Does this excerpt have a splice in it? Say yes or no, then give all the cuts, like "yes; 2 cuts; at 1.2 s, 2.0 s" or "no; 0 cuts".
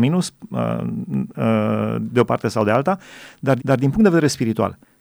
yes; 1 cut; at 3.6 s